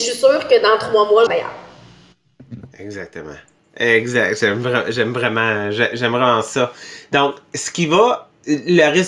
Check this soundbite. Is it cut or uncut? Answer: cut